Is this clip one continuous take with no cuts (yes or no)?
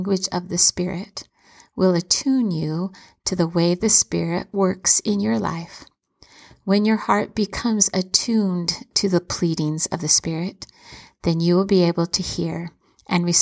yes